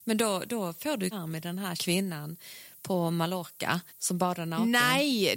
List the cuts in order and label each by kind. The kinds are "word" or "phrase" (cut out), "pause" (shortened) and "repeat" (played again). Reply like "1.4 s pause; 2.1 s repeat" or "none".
1.1 s word; 1.8 s word; 3.9 s pause